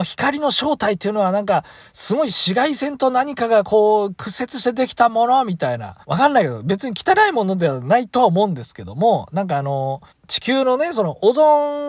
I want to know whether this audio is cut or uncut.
cut